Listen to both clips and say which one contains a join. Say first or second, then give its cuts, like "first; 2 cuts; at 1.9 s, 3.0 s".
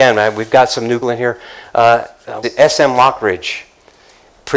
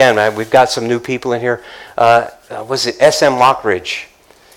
first; 2 cuts; at 1.0 s, 2.4 s